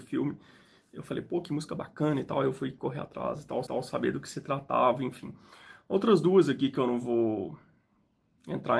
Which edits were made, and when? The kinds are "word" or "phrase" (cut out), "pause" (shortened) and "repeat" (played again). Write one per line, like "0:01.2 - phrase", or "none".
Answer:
0:03.7 - repeat

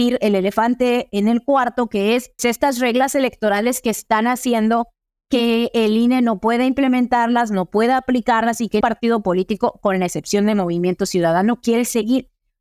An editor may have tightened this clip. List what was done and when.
0:02.4 - word
0:08.8 - word

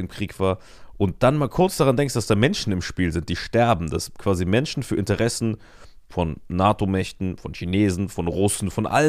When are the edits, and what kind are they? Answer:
none

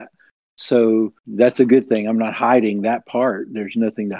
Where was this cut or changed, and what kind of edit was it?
0:01.2 - pause

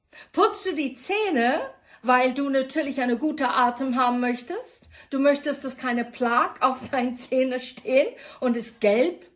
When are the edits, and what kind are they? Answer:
none

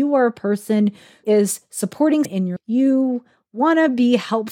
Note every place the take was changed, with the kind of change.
0:01.2 - word
0:02.2 - word
0:02.6 - word

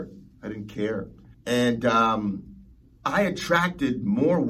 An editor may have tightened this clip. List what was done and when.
0:01.3 - pause
0:02.9 - pause

